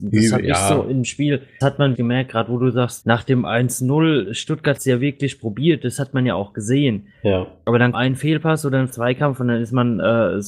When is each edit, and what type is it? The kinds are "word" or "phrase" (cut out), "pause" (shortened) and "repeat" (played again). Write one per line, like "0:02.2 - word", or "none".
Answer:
0:01.0 - word
0:01.6 - word
0:01.9 - word
0:03.0 - word
0:04.8 - word
0:07.9 - word
0:08.9 - word